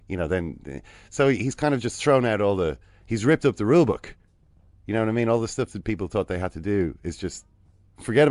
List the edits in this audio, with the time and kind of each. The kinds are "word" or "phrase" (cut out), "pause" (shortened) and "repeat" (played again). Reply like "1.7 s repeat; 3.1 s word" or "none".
none